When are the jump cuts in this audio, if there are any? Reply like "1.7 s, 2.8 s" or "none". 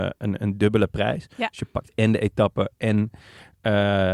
none